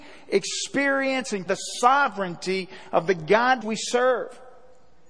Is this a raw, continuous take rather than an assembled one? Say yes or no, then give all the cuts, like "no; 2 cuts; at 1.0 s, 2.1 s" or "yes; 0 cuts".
no; 2 cuts; at 1.5 s, 3.6 s